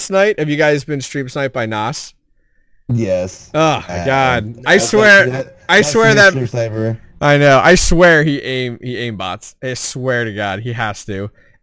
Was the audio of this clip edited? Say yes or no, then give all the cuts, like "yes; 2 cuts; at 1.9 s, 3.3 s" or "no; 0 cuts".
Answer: no; 0 cuts